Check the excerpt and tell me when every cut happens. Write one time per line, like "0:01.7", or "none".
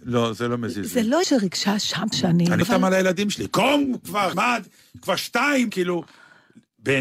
0:01.2
0:02.1
0:02.6
0:04.3
0:05.7